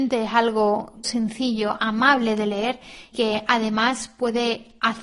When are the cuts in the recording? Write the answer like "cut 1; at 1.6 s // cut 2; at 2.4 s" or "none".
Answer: cut 1; at 1.0 s // cut 2; at 3.1 s